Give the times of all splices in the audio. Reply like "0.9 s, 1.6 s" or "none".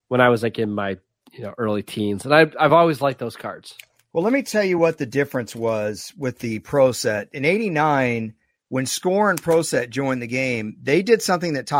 none